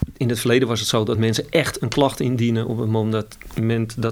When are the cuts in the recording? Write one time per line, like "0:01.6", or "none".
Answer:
none